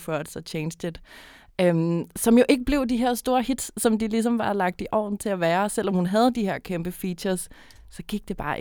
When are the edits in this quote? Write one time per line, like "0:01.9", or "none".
none